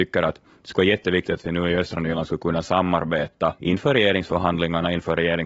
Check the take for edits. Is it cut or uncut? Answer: cut